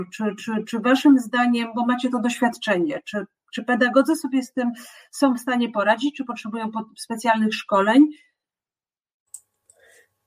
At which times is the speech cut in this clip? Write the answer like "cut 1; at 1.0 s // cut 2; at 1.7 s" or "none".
none